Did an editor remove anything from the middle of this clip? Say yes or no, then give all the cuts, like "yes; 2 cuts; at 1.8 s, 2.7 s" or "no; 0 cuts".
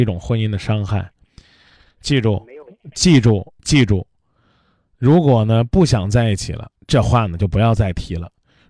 yes; 2 cuts; at 2.9 s, 3.6 s